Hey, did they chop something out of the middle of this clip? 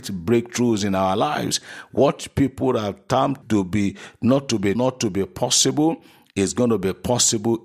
yes; 2 cuts; at 3.4 s, 4.8 s

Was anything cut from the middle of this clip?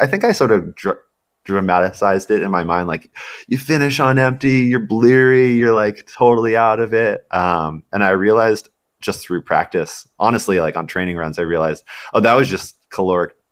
no; 0 cuts

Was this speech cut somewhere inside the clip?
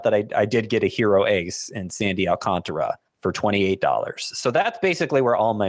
yes; 1 cut; at 3.1 s

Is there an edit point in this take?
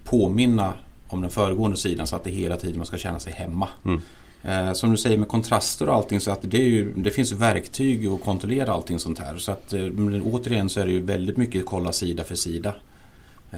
no; 0 cuts

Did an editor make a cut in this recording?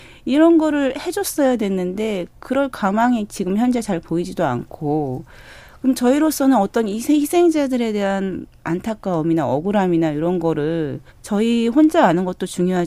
yes; 1 cut; at 11.1 s

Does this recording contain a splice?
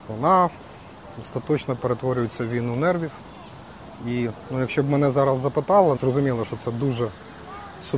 yes; 1 cut; at 6.0 s

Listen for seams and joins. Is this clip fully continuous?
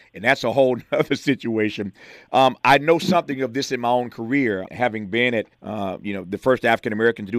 no; 3 cuts; at 2.6 s, 4.7 s, 5.5 s

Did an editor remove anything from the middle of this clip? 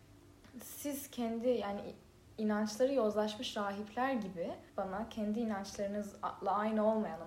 yes; 1 cut; at 4.7 s

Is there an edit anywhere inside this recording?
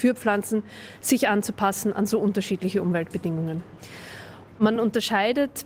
no; 0 cuts

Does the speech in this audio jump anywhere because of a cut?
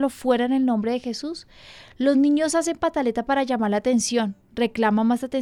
no; 0 cuts

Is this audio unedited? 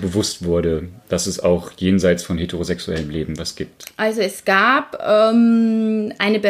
yes; 0 cuts

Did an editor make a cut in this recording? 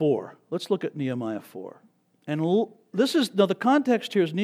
no; 0 cuts

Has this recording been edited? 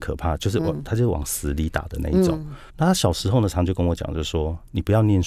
yes; 1 cut; at 2.7 s

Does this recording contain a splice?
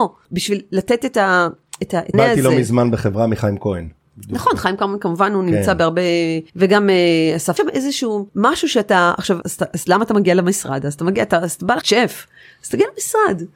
yes; 6 cuts; at 2.1 s, 6.5 s, 7.6 s, 8.3 s, 9.4 s, 11.8 s

